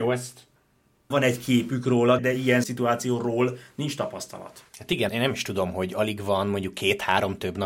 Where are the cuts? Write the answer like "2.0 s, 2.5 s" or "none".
1.1 s, 2.2 s, 2.6 s, 4.7 s, 5.1 s